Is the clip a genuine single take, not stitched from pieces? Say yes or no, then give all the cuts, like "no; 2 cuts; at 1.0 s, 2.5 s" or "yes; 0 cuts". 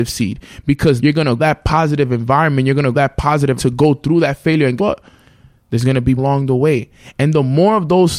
no; 6 cuts; at 1.0 s, 1.4 s, 2.9 s, 3.6 s, 4.8 s, 6.2 s